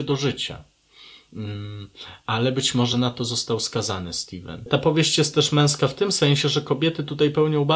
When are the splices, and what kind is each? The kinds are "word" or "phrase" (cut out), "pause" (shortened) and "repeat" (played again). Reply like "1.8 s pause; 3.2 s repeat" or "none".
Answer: none